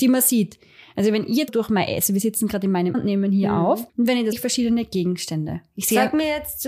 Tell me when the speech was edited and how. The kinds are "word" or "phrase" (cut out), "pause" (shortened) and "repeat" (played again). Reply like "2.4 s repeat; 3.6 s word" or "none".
1.5 s word; 2.9 s word; 3.9 s pause; 4.3 s phrase